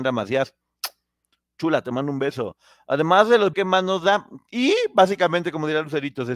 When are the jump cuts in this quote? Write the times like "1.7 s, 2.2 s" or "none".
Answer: 3.5 s